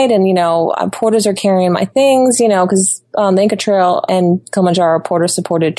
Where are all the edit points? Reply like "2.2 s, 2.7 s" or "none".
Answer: 4.1 s